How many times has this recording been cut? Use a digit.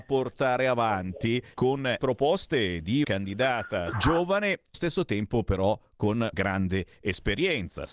6